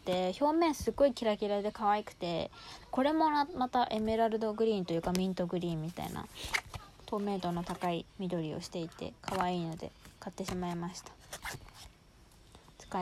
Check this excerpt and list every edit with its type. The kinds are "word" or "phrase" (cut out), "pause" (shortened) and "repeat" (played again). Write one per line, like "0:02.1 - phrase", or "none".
0:08.1 - pause
0:09.2 - pause